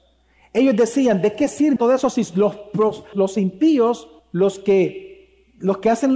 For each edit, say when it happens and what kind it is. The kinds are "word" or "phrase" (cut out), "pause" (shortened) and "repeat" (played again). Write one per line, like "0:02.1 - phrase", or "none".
0:01.8 - word
0:03.1 - word
0:04.2 - pause